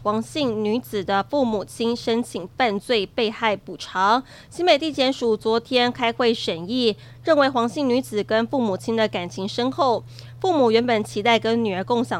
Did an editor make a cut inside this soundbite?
no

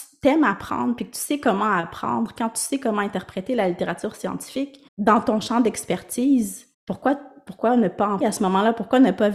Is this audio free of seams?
no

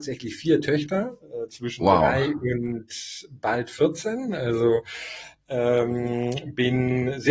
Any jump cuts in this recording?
no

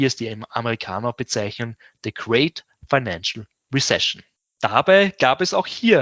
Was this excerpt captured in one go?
yes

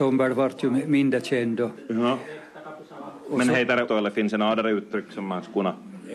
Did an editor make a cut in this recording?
yes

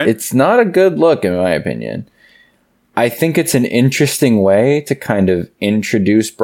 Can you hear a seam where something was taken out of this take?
no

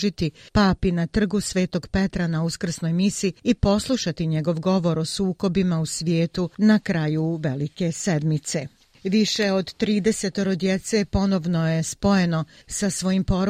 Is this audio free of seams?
yes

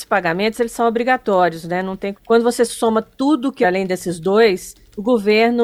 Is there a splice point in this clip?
yes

